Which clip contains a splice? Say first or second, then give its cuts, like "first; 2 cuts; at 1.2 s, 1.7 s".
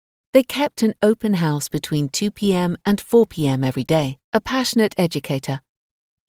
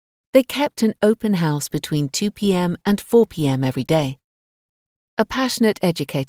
first; 1 cut; at 4.2 s